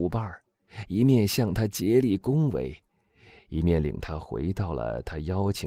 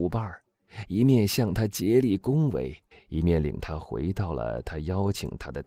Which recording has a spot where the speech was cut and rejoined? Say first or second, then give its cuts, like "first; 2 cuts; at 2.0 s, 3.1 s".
second; 1 cut; at 2.9 s